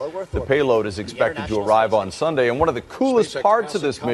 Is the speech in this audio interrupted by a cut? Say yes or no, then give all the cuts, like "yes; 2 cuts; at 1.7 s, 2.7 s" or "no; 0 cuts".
no; 0 cuts